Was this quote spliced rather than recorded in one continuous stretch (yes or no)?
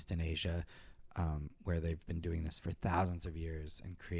no